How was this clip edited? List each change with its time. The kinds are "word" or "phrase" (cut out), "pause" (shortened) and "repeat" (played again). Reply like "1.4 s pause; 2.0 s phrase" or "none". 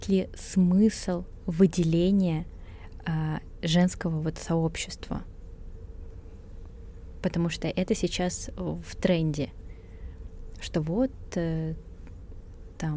none